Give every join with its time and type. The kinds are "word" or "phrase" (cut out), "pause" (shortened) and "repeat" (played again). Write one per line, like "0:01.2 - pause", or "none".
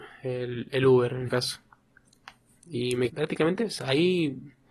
0:01.3 - word
0:03.1 - word